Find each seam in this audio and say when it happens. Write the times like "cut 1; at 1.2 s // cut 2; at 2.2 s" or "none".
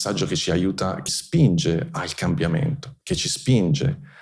cut 1; at 1.1 s // cut 2; at 3.0 s